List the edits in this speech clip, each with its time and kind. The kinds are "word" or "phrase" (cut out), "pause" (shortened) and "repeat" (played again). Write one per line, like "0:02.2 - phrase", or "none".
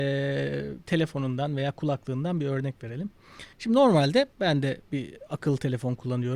0:03.5 - pause
0:04.3 - pause